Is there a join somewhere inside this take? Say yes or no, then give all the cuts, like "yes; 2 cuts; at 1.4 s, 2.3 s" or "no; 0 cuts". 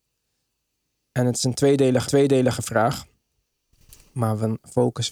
yes; 1 cut; at 2.0 s